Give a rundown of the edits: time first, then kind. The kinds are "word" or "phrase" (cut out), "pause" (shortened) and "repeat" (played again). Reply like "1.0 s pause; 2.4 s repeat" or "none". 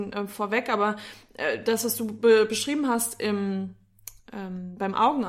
none